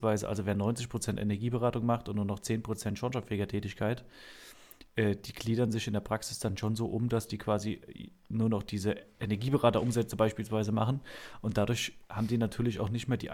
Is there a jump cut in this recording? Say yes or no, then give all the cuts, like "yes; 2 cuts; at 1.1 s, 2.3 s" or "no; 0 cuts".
no; 0 cuts